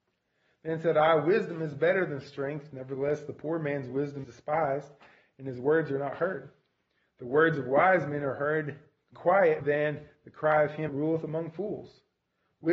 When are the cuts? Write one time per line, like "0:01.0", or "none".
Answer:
0:04.2
0:09.1
0:09.6
0:10.9

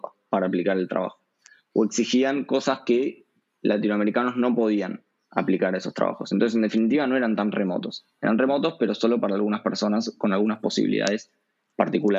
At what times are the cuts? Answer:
none

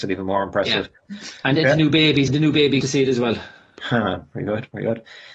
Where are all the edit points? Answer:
0:01.6
0:02.3
0:02.8

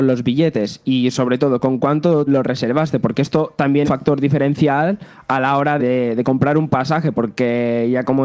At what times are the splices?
0:02.3
0:03.8
0:05.8

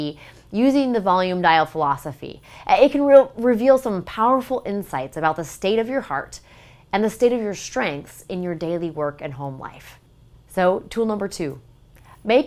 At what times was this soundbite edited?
none

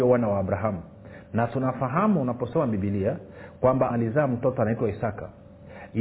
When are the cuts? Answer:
0:03.9

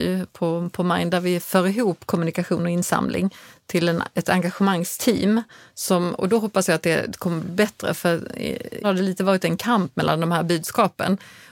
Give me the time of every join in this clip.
0:08.8

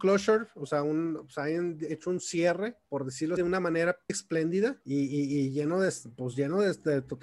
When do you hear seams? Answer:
0:02.8
0:03.4
0:04.1
0:04.8

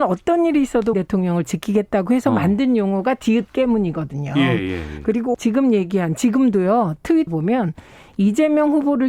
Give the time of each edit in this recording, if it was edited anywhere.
0:00.9
0:05.3
0:07.3

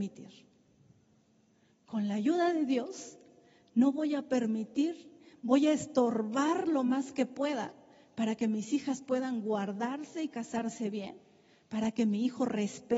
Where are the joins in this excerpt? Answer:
none

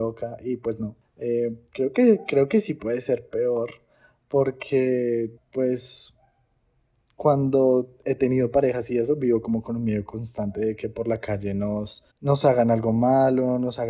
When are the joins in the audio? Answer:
0:05.4
0:12.1

